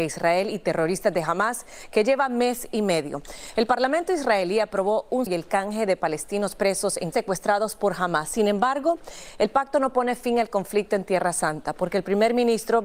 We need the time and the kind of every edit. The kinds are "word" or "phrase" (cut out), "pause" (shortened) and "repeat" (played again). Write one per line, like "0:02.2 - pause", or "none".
0:05.3 - phrase
0:07.1 - phrase